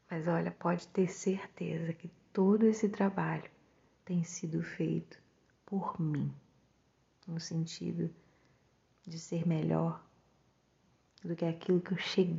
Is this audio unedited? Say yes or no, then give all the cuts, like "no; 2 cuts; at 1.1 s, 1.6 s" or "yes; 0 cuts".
yes; 0 cuts